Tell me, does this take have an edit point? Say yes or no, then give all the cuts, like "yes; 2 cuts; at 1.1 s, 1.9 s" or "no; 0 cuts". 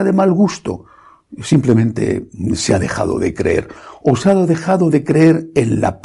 no; 0 cuts